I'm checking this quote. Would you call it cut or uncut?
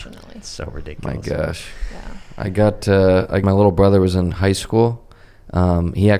cut